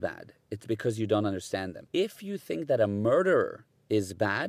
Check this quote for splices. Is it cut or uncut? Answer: uncut